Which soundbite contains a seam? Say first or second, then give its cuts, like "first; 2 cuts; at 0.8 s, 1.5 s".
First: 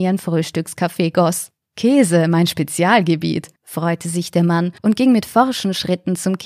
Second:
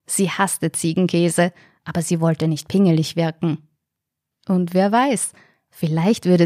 first; 3 cuts; at 1.6 s, 3.6 s, 4.8 s